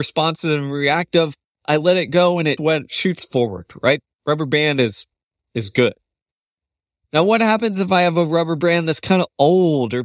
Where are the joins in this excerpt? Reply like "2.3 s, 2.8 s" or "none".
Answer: 2.6 s